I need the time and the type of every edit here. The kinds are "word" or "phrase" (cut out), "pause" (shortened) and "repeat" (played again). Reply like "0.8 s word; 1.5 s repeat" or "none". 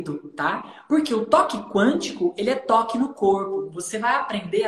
none